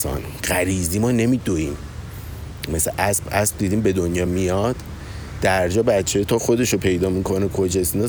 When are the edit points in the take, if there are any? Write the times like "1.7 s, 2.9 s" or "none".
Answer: none